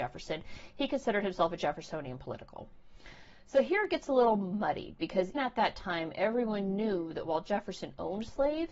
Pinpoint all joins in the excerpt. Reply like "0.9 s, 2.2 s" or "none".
5.3 s